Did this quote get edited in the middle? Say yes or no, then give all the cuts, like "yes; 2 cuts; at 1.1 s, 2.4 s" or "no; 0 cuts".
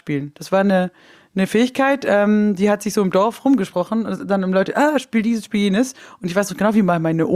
no; 0 cuts